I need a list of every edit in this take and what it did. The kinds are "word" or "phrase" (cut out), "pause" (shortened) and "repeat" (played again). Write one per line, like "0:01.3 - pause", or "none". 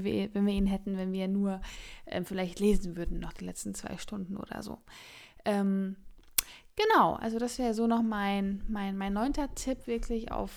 none